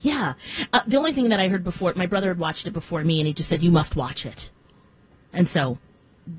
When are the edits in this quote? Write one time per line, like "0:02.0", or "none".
none